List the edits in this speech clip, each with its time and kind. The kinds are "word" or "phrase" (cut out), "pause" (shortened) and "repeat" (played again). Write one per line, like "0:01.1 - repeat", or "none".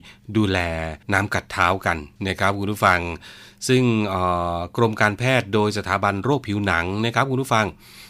0:01.0 - pause
0:02.2 - pause